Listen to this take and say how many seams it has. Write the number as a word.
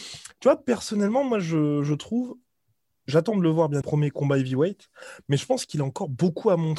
one